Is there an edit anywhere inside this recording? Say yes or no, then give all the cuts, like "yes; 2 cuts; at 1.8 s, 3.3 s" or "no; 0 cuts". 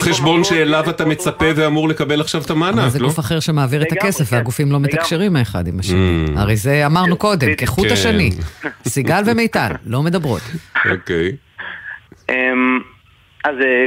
no; 0 cuts